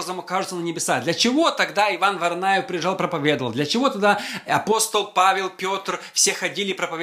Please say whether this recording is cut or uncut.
uncut